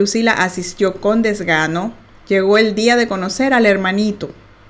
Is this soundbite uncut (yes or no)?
yes